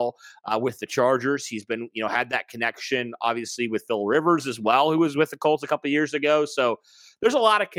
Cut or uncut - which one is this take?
uncut